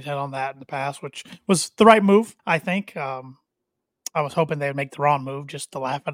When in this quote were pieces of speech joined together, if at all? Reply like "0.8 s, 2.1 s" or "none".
2.4 s